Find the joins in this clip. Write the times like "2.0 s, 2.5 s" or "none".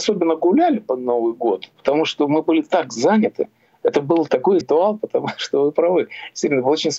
4.6 s